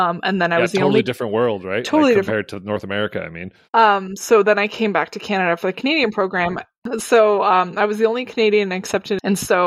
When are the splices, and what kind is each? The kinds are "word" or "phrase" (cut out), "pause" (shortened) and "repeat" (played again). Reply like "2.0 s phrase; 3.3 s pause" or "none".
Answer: 3.6 s pause